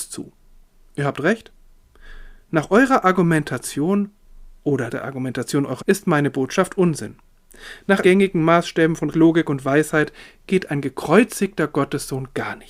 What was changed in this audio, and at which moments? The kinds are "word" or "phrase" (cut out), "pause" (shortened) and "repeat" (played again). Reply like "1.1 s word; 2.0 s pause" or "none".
4.9 s word; 5.8 s word; 8.0 s word; 9.1 s word